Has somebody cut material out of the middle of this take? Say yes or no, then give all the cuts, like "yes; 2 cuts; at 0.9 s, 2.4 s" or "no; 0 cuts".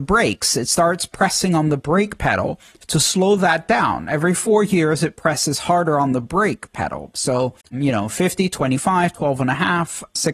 yes; 1 cut; at 7.6 s